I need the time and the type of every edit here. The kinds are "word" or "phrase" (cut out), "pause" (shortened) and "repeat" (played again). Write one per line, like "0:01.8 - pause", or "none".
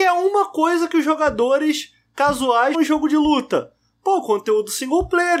0:02.7 - word